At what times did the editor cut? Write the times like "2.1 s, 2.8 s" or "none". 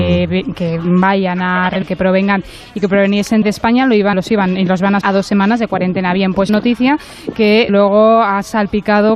1.8 s, 3.4 s, 4.1 s, 5.0 s, 6.5 s, 7.7 s